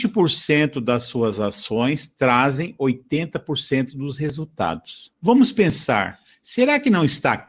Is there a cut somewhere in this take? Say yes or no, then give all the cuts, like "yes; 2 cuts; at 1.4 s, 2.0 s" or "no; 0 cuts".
no; 0 cuts